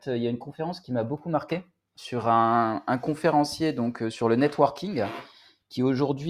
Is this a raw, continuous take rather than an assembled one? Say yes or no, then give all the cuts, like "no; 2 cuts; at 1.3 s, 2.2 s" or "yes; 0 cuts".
yes; 0 cuts